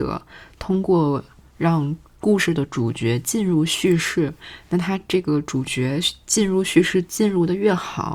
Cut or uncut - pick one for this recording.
uncut